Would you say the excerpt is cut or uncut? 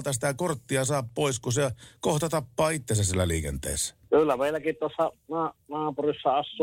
cut